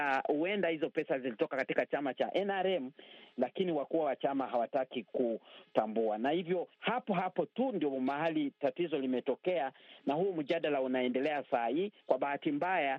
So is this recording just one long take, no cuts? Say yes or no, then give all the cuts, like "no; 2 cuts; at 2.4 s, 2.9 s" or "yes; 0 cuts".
no; 2 cuts; at 6.7 s, 12.0 s